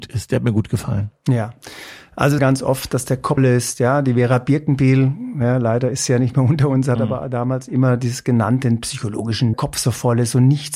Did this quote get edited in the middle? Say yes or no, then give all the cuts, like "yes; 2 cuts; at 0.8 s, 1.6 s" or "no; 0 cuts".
yes; 3 cuts; at 2.4 s, 3.4 s, 9.5 s